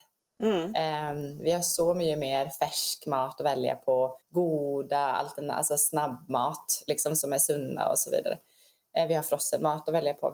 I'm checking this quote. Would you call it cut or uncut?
cut